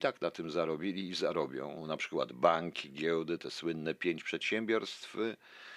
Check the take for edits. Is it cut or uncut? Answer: uncut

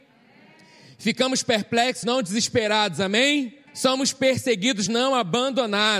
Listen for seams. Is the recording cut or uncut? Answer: cut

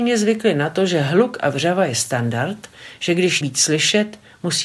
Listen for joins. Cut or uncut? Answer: cut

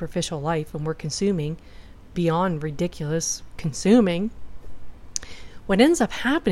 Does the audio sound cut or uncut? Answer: cut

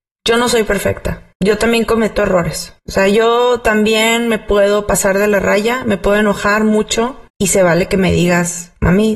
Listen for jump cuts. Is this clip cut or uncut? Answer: cut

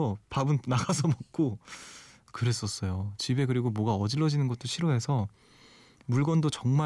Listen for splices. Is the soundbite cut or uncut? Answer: uncut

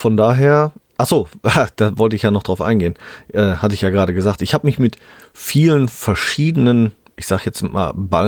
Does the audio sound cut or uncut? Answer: uncut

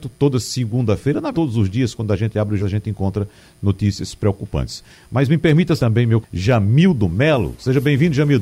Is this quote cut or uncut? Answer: cut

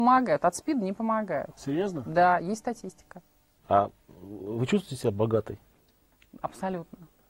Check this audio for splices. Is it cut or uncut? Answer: uncut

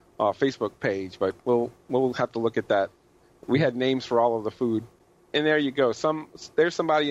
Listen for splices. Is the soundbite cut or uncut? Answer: uncut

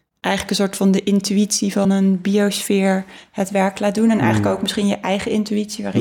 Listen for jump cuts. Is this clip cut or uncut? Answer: uncut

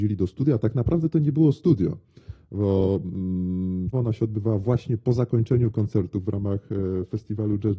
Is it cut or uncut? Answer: cut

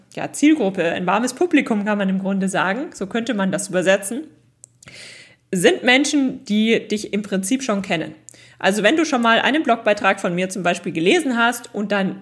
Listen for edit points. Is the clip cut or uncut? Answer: uncut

